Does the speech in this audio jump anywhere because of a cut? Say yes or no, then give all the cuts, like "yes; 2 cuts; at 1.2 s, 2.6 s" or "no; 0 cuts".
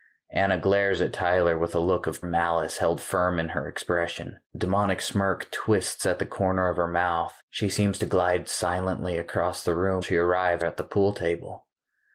yes; 5 cuts; at 2.2 s, 4.5 s, 7.4 s, 10.0 s, 10.6 s